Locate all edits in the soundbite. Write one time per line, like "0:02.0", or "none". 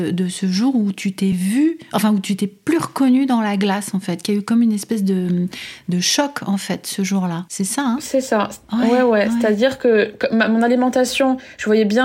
none